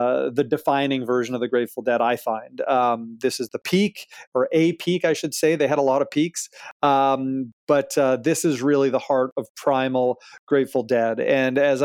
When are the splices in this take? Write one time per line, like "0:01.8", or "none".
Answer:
none

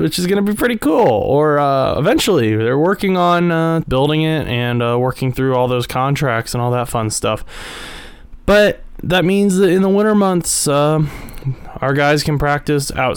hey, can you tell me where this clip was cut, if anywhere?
0:03.8

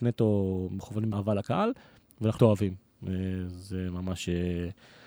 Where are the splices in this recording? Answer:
0:01.1
0:02.4

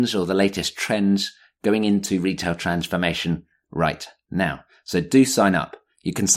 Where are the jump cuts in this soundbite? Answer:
none

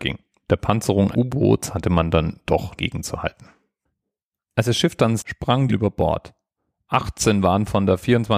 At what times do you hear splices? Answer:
0:01.1
0:02.8
0:05.2
0:05.7

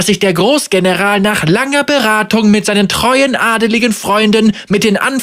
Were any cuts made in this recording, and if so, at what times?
none

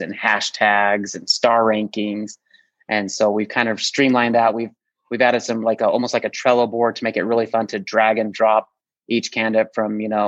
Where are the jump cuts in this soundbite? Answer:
none

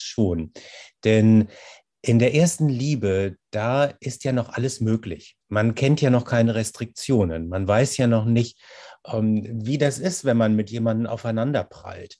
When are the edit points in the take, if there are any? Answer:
0:05.4

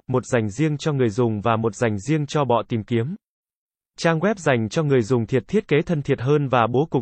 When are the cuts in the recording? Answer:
none

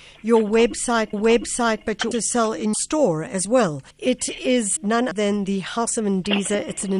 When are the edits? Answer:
0:01.1
0:02.1
0:02.7
0:03.9
0:04.8
0:05.1

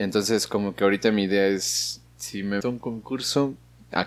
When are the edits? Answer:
0:02.6

